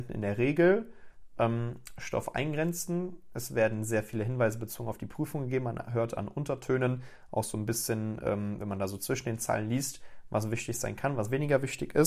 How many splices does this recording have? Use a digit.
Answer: 0